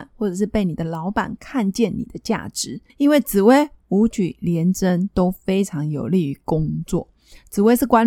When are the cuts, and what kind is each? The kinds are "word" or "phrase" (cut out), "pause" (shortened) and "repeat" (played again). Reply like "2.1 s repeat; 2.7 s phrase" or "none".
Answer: 2.9 s pause